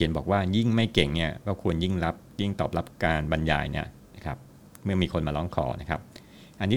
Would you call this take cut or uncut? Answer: uncut